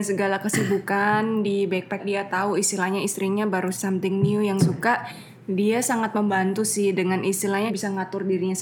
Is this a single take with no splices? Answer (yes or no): no